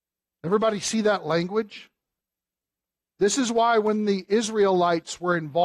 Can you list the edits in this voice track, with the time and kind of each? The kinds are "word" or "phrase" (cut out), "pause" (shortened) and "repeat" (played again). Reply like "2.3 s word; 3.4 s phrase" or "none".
none